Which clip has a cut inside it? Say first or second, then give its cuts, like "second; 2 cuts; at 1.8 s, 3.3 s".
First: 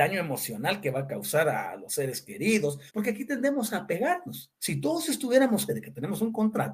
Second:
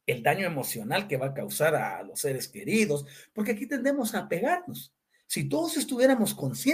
first; 3 cuts; at 2.9 s, 4.6 s, 5.7 s